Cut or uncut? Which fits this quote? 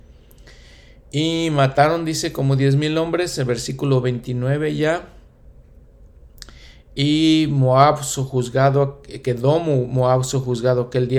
uncut